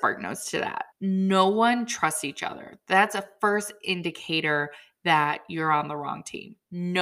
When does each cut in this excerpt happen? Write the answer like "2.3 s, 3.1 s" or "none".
0.9 s